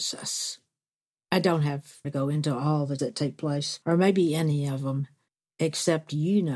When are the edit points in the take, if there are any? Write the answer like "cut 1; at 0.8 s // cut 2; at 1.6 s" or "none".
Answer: cut 1; at 2.0 s // cut 2; at 3.0 s // cut 3; at 3.8 s // cut 4; at 5.3 s